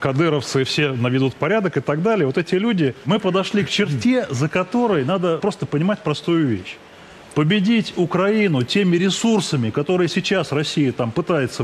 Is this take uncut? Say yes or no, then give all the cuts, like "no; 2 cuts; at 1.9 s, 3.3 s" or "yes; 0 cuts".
no; 1 cut; at 5.4 s